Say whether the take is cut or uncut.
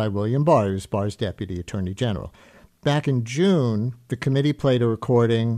uncut